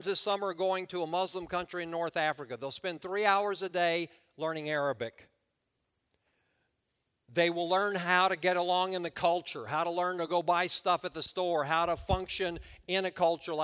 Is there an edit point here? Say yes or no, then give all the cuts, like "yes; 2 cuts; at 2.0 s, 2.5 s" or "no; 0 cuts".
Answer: no; 0 cuts